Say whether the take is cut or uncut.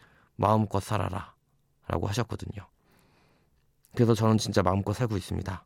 uncut